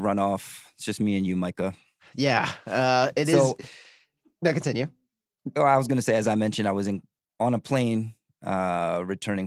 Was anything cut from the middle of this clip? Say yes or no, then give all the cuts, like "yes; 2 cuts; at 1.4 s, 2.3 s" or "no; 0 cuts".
no; 0 cuts